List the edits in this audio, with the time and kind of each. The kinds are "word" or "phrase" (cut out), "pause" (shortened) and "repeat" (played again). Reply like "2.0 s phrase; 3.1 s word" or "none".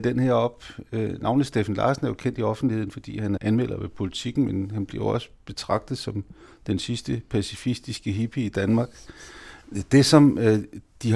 3.4 s word